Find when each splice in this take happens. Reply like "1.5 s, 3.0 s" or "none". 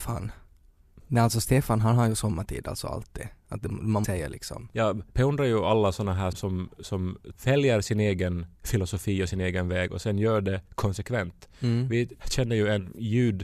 4.0 s, 6.3 s, 8.5 s